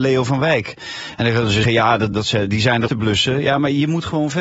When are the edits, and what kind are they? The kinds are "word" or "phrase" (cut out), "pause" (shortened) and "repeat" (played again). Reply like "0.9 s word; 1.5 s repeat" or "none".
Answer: 1.6 s word; 2.1 s word; 2.9 s phrase